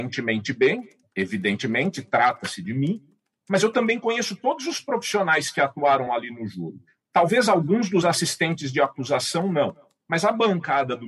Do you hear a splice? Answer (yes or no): no